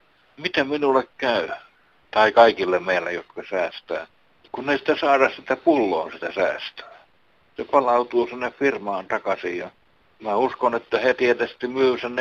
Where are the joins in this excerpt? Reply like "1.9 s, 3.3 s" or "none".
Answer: none